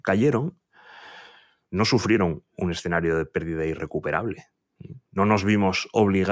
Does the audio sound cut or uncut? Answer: uncut